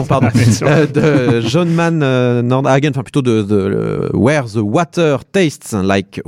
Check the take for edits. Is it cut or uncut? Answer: uncut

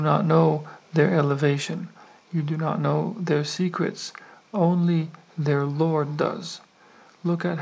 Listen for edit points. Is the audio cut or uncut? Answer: uncut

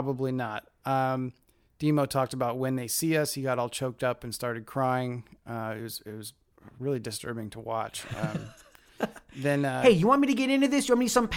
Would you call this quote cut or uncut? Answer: uncut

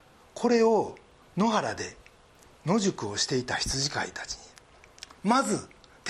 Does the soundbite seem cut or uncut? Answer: uncut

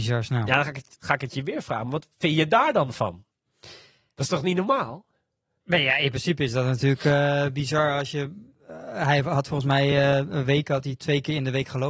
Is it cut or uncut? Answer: uncut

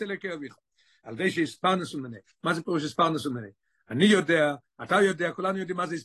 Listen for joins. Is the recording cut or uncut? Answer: uncut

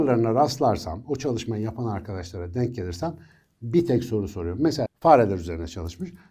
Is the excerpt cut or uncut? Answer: cut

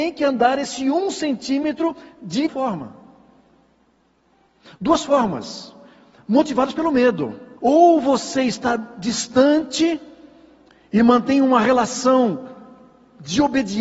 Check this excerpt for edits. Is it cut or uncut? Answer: cut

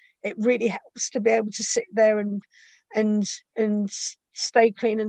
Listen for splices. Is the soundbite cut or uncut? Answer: uncut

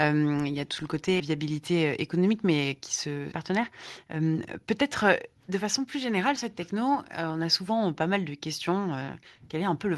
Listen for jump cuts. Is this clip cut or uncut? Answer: cut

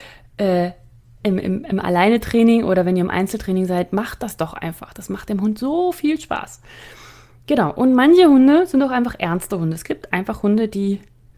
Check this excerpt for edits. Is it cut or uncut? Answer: uncut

